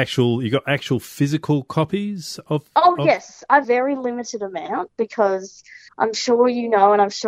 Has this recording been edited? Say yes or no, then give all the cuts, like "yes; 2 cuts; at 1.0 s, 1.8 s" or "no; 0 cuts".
yes; 2 cuts; at 3.6 s, 5.9 s